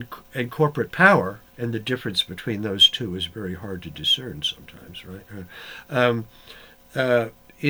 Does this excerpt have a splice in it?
yes; 1 cut; at 1.4 s

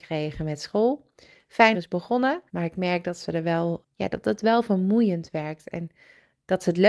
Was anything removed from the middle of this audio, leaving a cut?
yes; 3 cuts; at 1.7 s, 2.5 s, 3.8 s

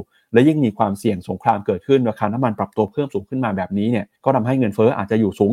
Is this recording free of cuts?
no; 1 cut; at 4.1 s

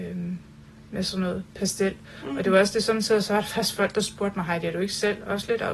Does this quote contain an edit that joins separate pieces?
no; 0 cuts

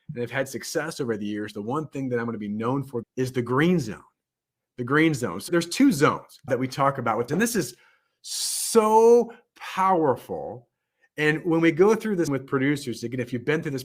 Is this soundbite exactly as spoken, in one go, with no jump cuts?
no; 5 cuts; at 3.0 s, 5.5 s, 6.5 s, 7.3 s, 12.3 s

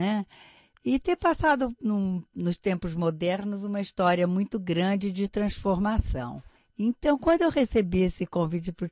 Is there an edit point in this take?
yes; 1 cut; at 6.6 s

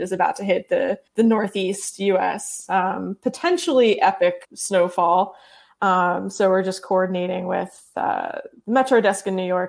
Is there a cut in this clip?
yes; 2 cuts; at 1.1 s, 4.4 s

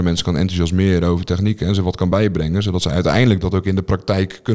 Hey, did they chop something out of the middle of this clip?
no; 0 cuts

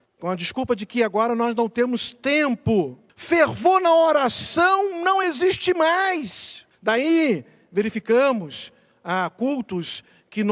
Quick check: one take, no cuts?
yes; 0 cuts

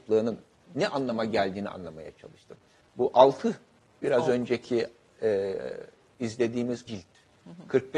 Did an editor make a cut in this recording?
yes; 1 cut; at 6.9 s

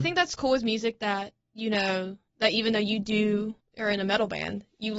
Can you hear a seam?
yes; 2 cuts; at 2.3 s, 3.6 s

